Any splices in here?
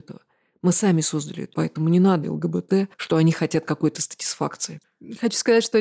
yes; 2 cuts; at 1.5 s, 2.2 s

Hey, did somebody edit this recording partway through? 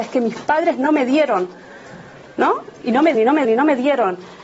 yes; 2 cuts; at 3.1 s, 3.4 s

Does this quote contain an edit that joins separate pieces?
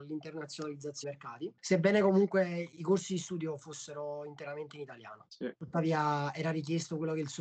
yes; 2 cuts; at 1.0 s, 2.8 s

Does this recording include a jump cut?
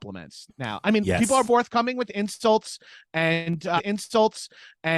yes; 2 cuts; at 1.4 s, 3.8 s

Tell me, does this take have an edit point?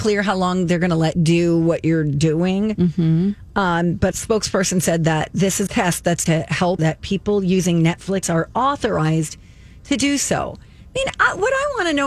yes; 6 cuts; at 1.1 s, 4.1 s, 5.7 s, 6.3 s, 6.8 s, 8.2 s

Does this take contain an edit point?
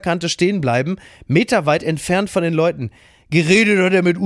no; 0 cuts

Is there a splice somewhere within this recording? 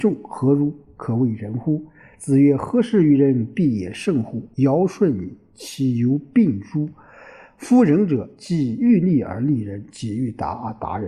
yes; 1 cut; at 4.5 s

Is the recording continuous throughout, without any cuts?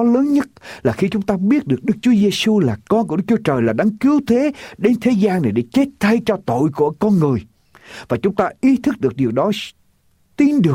yes; 0 cuts

